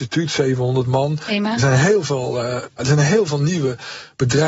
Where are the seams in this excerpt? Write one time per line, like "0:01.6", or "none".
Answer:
0:02.8